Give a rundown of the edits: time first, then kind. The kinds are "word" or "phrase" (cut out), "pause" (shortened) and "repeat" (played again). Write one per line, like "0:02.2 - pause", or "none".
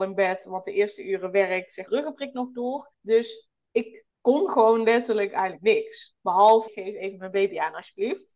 0:01.9 - phrase
0:02.9 - pause
0:04.1 - pause
0:06.7 - phrase